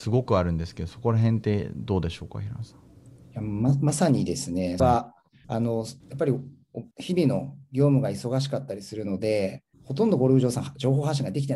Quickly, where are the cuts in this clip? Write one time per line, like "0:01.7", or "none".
0:04.8
0:05.4
0:06.0
0:06.9
0:09.7